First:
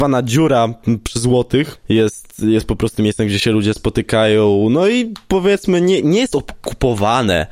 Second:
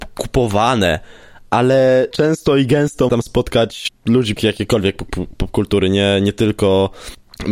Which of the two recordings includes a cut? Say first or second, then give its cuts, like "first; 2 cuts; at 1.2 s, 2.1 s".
second; 3 cuts; at 2.1 s, 3.1 s, 4.4 s